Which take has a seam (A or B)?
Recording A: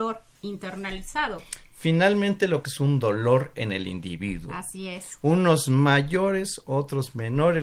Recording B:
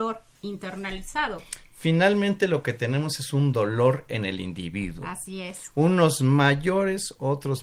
A